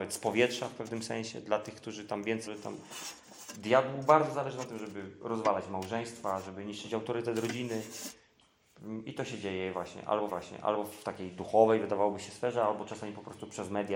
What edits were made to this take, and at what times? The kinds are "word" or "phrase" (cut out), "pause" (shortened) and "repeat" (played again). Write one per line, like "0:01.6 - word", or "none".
0:02.5 - word
0:10.3 - repeat